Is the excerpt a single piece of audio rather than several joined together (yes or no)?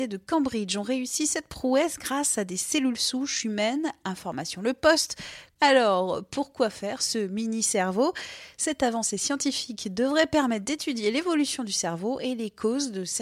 yes